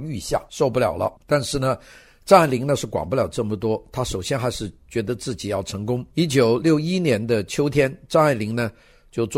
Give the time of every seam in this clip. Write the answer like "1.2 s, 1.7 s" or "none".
1.2 s, 6.1 s

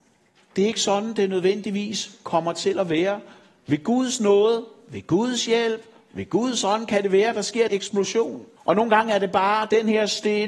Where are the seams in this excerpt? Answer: 7.7 s, 8.6 s

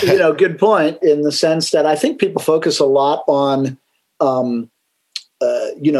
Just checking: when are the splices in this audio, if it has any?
1.0 s

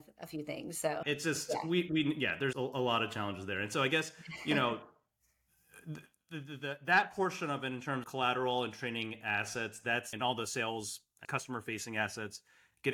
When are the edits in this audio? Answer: 1.0 s, 2.5 s, 8.0 s, 10.1 s, 11.2 s

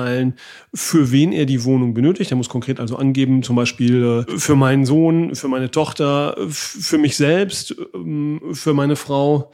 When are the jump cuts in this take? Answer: none

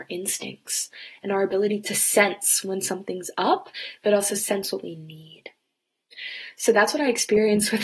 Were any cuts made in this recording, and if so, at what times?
none

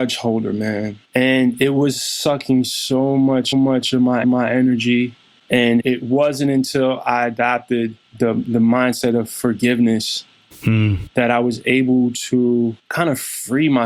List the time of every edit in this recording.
1.0 s, 3.5 s, 4.2 s, 8.1 s, 12.8 s

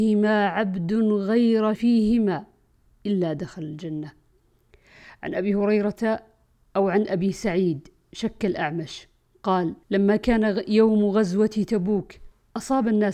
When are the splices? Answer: 1.7 s, 9.8 s

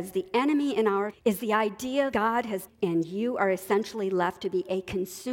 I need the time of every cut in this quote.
1.1 s, 2.1 s, 2.7 s

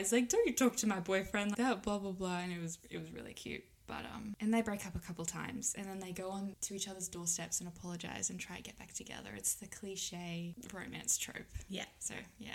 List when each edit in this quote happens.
1.5 s

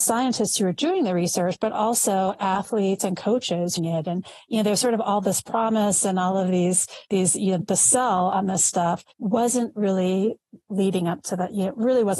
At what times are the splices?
3.8 s, 7.0 s, 7.6 s, 9.1 s

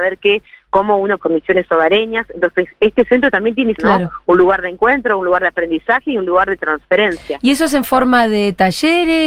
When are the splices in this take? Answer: 1.2 s, 3.8 s

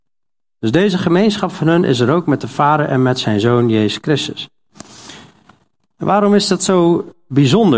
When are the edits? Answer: none

